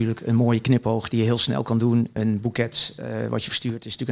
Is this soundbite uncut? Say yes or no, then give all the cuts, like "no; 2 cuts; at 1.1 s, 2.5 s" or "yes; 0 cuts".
yes; 0 cuts